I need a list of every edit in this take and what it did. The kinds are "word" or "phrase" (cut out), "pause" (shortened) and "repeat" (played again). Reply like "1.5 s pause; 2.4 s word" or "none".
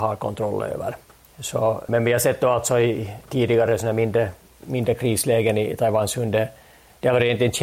none